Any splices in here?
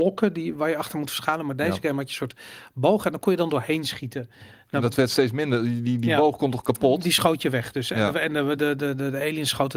no; 0 cuts

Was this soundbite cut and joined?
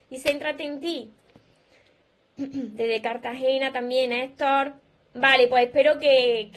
no; 0 cuts

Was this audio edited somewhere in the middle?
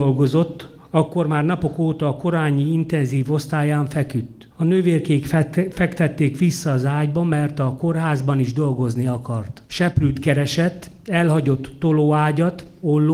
yes; 2 cuts; at 4.5 s, 9.6 s

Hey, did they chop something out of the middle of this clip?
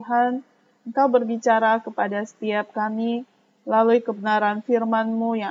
no; 0 cuts

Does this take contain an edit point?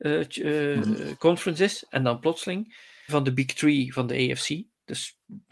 yes; 1 cut; at 3.1 s

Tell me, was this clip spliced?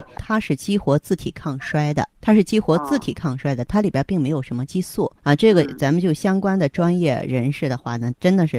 yes; 2 cuts; at 2.1 s, 5.2 s

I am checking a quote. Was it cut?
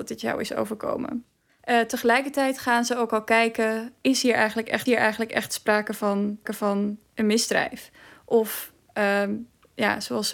yes; 3 cuts; at 1.5 s, 4.9 s, 6.5 s

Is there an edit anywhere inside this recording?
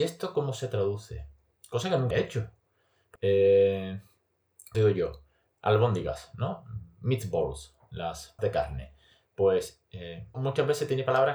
yes; 5 cuts; at 2.1 s, 3.2 s, 4.7 s, 8.4 s, 10.3 s

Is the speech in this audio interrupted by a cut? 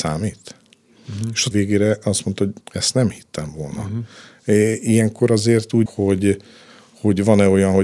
yes; 3 cuts; at 1.5 s, 2.6 s, 5.9 s

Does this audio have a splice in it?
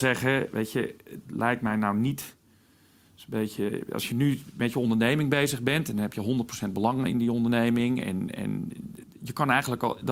no; 0 cuts

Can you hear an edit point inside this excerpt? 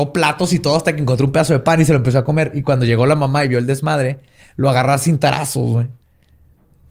no; 0 cuts

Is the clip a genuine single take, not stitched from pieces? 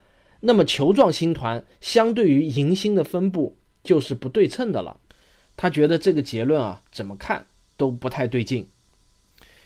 yes; 0 cuts

